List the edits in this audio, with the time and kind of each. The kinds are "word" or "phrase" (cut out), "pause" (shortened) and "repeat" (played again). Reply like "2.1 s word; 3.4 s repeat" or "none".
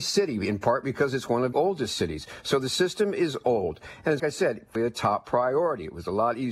1.5 s word; 4.2 s word; 4.8 s phrase